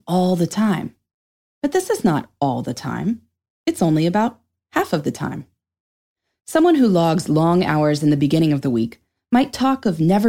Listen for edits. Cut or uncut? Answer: uncut